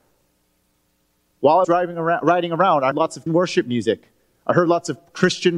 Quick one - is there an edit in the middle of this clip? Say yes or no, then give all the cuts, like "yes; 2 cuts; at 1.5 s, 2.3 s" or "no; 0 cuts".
yes; 3 cuts; at 1.6 s, 2.9 s, 3.3 s